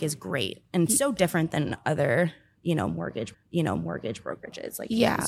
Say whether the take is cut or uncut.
cut